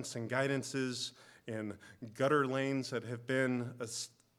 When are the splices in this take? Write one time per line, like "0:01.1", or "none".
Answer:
none